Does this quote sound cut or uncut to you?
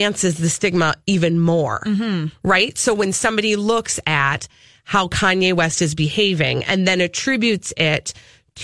uncut